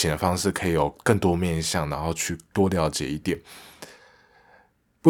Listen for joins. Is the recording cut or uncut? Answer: uncut